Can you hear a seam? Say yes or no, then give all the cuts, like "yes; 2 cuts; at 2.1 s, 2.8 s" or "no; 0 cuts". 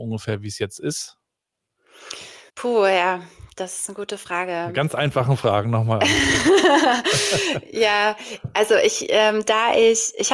yes; 1 cut; at 2.5 s